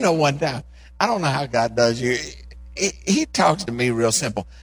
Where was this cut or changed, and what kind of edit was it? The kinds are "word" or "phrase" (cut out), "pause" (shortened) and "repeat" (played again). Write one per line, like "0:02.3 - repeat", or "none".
none